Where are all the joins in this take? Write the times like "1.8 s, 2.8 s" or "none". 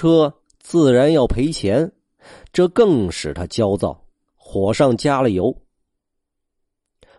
none